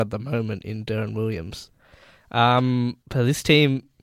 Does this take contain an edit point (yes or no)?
yes